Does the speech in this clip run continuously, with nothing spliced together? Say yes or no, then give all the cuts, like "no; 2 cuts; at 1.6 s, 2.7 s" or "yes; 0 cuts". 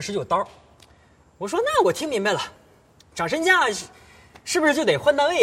yes; 0 cuts